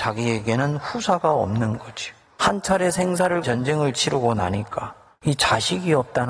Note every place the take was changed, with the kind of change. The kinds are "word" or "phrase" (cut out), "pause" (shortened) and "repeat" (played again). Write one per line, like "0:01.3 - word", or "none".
0:03.4 - word